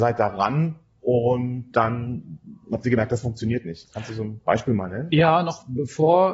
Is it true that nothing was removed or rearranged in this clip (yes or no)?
yes